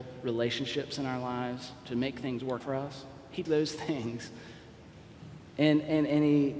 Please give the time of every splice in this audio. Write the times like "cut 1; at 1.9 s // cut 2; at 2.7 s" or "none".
cut 1; at 2.6 s // cut 2; at 3.5 s